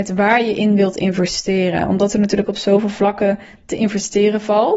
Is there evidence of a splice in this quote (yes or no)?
no